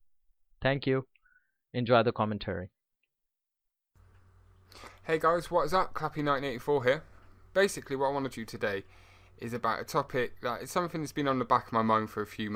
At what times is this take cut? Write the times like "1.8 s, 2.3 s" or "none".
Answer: 8.3 s